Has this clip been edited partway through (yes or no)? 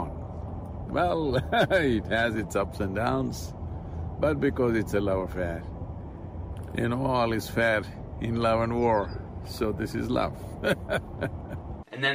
no